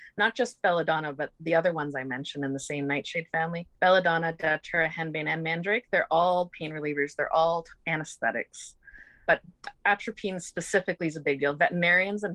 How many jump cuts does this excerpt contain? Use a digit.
1